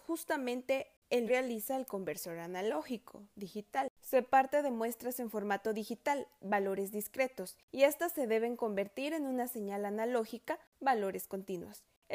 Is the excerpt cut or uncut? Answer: cut